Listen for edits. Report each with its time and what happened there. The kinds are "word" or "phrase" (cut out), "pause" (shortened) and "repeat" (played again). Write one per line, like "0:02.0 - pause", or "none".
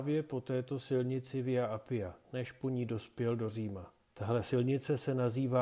0:02.2 - pause
0:04.1 - pause

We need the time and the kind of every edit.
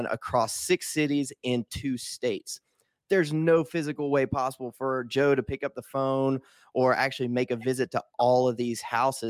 none

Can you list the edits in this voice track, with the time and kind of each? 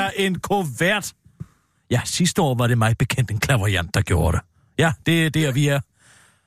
none

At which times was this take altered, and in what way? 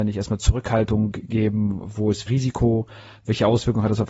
0:02.3 - word

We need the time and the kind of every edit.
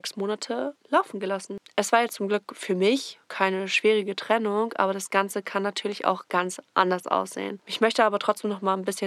0:03.2 - pause

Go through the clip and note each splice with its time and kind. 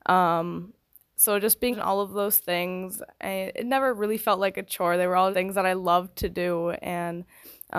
0:01.7 - word
0:05.3 - word

